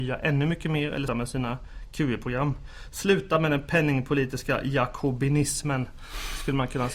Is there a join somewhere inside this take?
yes; 1 cut; at 1.1 s

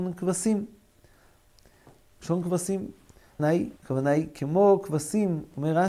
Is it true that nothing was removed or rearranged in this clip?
no; 2 cuts; at 3.4 s, 3.8 s

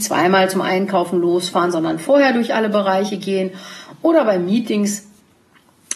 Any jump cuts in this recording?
no; 0 cuts

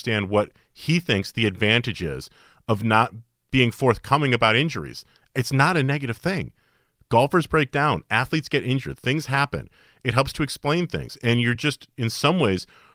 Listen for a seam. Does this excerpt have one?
no; 0 cuts

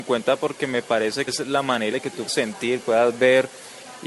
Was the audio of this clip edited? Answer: yes; 3 cuts; at 1.3 s, 1.9 s, 2.3 s

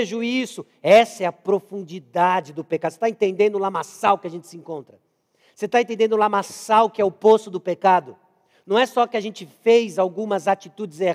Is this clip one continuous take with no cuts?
yes; 0 cuts

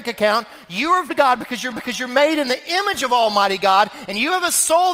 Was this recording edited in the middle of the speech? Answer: yes; 2 cuts; at 1.1 s, 1.7 s

